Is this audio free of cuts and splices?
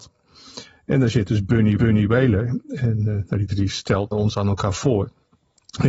no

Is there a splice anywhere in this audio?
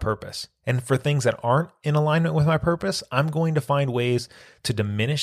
no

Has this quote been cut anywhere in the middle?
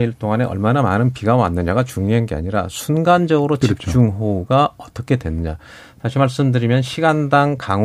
no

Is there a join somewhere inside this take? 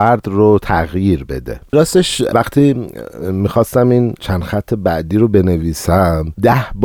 no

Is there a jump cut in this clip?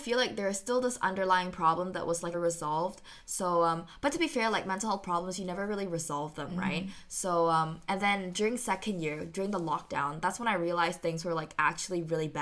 yes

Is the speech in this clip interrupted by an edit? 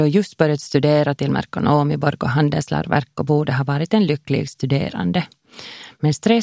no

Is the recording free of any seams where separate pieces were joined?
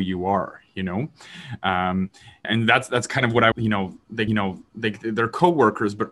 no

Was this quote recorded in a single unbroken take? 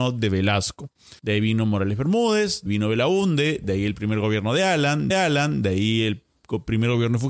no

